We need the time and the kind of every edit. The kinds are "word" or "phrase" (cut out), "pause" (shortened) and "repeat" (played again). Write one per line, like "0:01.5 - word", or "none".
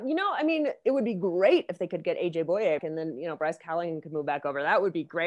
0:02.8 - word